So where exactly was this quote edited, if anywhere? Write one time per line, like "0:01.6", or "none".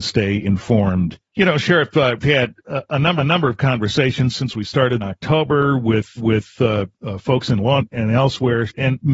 0:01.3
0:02.2
0:03.2
0:05.0
0:06.2
0:07.8